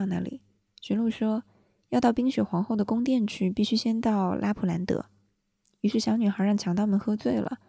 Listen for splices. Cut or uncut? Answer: uncut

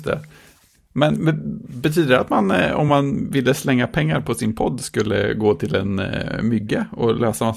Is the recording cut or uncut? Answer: uncut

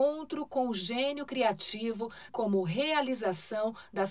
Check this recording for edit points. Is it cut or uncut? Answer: cut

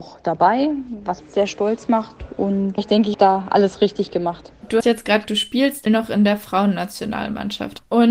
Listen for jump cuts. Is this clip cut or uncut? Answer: cut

